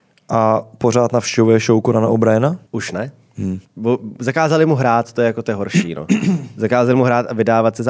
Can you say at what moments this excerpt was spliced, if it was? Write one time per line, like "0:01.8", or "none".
0:02.7
0:03.6